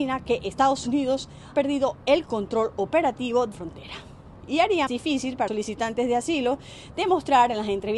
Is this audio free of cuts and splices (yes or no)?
no